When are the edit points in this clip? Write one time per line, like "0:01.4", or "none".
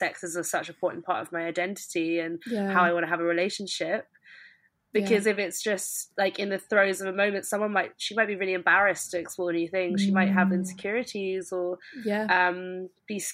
none

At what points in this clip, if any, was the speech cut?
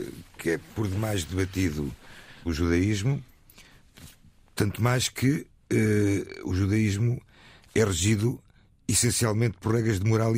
0:02.5

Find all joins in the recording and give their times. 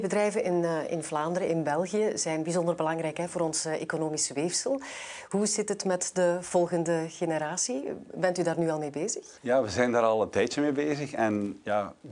0:09.4

